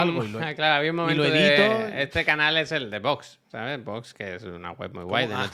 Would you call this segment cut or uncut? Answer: uncut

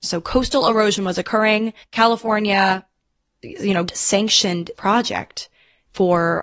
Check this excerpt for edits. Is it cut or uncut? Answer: cut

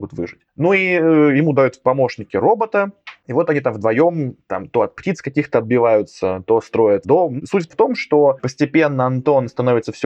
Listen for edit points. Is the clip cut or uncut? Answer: uncut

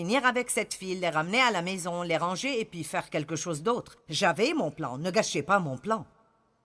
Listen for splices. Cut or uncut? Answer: cut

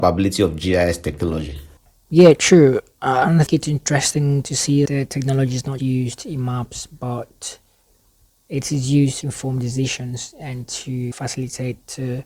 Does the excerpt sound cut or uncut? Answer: cut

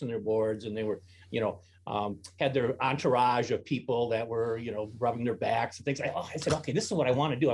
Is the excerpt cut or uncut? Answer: uncut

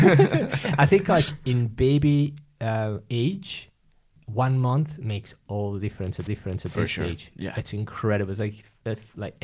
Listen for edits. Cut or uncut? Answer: cut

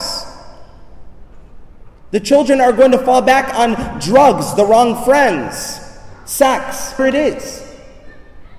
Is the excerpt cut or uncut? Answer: cut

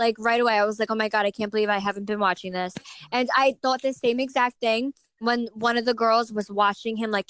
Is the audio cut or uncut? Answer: uncut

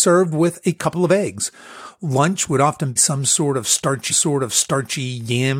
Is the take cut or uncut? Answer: cut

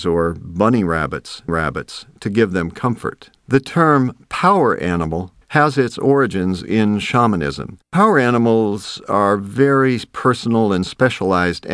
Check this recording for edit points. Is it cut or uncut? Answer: cut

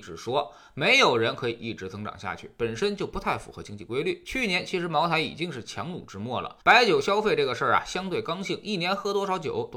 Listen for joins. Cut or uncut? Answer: cut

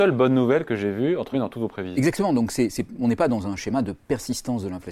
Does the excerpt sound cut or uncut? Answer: cut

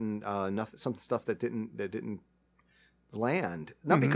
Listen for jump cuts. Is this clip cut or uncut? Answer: uncut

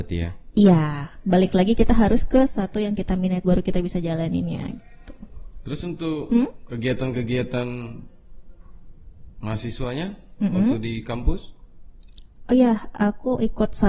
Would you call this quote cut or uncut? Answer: cut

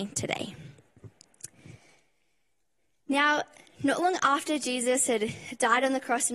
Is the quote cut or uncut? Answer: uncut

